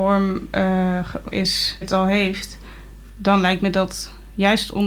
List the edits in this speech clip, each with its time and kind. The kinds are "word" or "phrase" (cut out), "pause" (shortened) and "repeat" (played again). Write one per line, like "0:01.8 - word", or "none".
0:01.3 - word
0:01.8 - word